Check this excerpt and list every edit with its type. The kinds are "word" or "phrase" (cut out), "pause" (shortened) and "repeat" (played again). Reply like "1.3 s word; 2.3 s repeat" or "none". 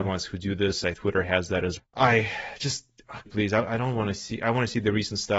0.9 s word; 1.8 s word; 3.3 s word